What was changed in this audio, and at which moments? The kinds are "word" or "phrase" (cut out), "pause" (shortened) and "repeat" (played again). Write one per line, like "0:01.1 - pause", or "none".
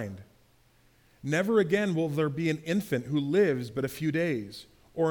none